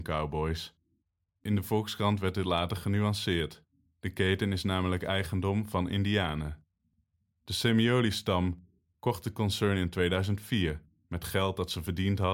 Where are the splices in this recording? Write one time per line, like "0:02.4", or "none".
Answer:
none